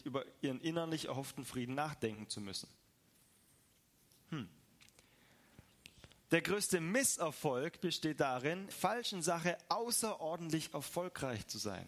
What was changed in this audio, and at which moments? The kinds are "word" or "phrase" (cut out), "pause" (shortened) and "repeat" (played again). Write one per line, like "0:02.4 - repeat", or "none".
0:08.7 - word